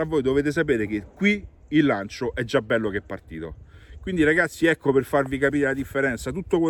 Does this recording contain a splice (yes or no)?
no